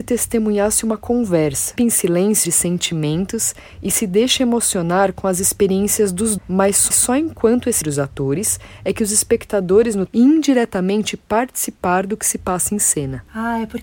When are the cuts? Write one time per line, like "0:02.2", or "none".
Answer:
0:01.8
0:02.4
0:06.4
0:06.9
0:07.8
0:10.1